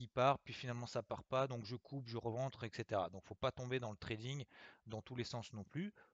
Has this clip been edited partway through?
no; 0 cuts

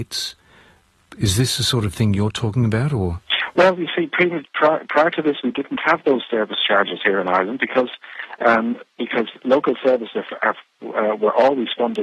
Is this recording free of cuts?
yes; 0 cuts

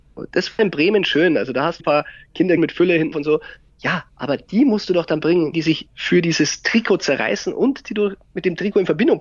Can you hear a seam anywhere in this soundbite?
yes; 4 cuts; at 1.8 s, 2.6 s, 3.1 s, 5.5 s

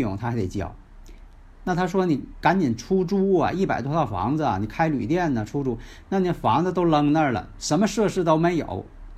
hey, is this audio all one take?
yes; 0 cuts

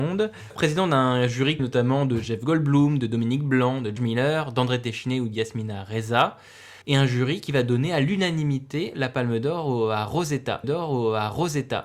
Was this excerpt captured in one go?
no; 4 cuts; at 1.6 s, 4.0 s, 6.8 s, 10.6 s

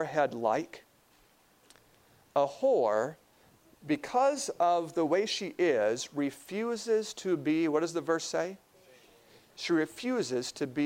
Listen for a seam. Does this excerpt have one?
no; 0 cuts

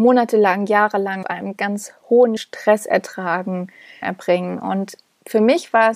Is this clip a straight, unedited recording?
no; 4 cuts; at 1.2 s, 1.6 s, 2.4 s, 4.0 s

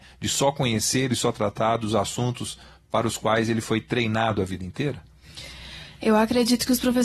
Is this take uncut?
yes; 0 cuts

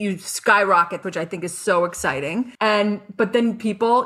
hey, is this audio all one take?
no; 2 cuts; at 1.0 s, 2.5 s

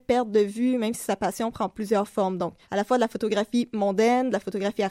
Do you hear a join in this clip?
yes; 1 cut; at 2.6 s

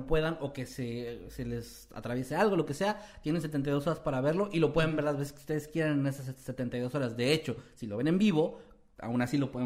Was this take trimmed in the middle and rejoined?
no; 0 cuts

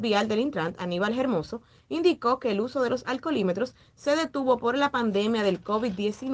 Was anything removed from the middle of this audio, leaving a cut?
no; 0 cuts

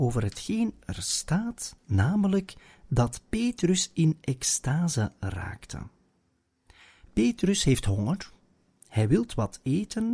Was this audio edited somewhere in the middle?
no; 0 cuts

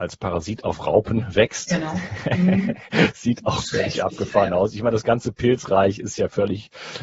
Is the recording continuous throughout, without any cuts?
yes; 0 cuts

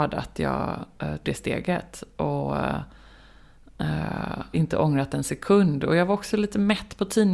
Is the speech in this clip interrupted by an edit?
yes; 2 cuts; at 1.2 s, 4.5 s

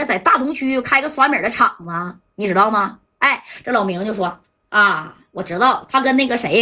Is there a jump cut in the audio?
yes; 1 cut; at 4.4 s

